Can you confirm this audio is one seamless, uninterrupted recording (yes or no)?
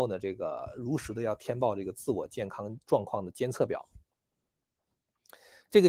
yes